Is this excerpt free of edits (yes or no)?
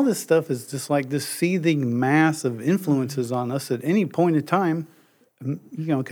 yes